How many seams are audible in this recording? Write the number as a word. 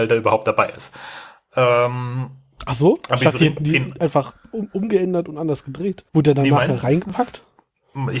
one